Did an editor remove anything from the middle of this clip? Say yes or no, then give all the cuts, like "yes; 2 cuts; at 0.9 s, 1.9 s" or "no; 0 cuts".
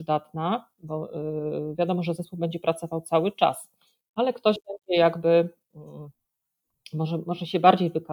no; 0 cuts